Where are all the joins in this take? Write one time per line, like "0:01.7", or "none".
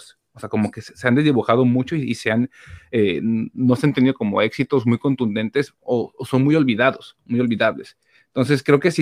none